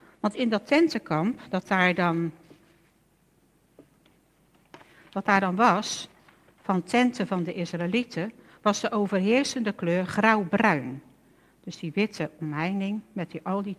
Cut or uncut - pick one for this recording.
uncut